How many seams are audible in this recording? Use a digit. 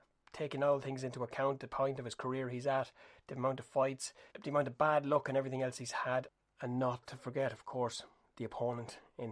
1